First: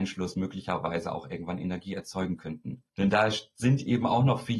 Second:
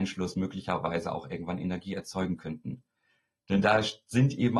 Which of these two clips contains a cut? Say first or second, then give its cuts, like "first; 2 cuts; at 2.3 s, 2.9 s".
first; 1 cut; at 2.9 s